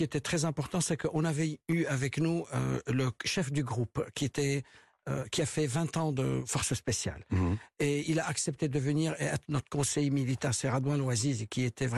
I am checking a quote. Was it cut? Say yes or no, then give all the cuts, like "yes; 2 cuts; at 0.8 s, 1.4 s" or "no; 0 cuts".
no; 0 cuts